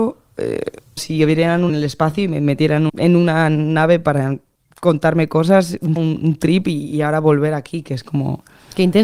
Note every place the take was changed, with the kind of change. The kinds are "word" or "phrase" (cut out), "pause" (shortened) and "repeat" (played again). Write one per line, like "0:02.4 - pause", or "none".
0:01.0 - word
0:01.7 - word
0:02.9 - word
0:06.0 - word